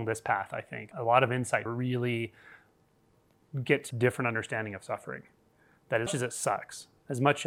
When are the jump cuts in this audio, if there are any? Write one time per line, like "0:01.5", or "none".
0:00.9
0:01.7
0:03.9
0:06.1